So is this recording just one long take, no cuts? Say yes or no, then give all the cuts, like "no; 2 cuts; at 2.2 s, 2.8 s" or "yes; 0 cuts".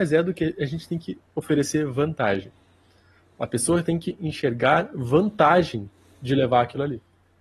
yes; 0 cuts